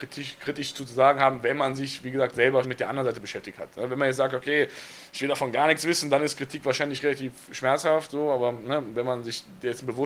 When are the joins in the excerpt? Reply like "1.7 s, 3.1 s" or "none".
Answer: 2.6 s